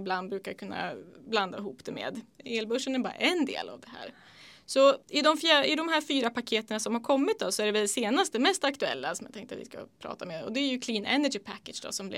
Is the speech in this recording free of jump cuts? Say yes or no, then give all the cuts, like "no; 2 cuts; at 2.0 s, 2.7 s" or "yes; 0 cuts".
no; 1 cut; at 5.0 s